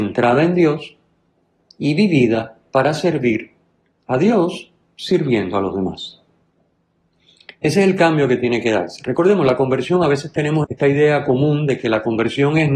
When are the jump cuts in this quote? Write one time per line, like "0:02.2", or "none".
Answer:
0:10.6